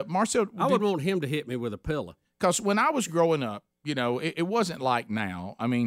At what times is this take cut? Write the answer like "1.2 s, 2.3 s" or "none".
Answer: none